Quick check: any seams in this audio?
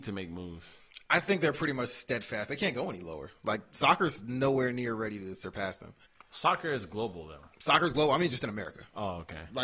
yes; 1 cut; at 6.1 s

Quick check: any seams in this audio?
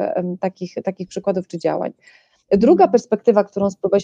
no; 0 cuts

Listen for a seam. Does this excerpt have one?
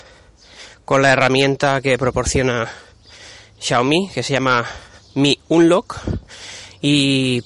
no; 0 cuts

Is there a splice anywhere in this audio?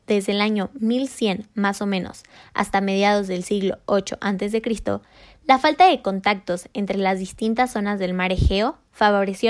no; 0 cuts

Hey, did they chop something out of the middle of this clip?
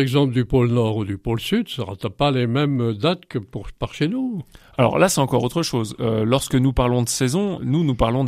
no; 0 cuts

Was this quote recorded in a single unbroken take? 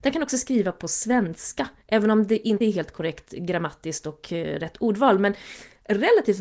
no; 1 cut; at 2.6 s

